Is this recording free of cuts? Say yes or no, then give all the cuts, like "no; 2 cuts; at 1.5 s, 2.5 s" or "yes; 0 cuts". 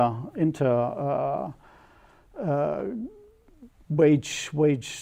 yes; 0 cuts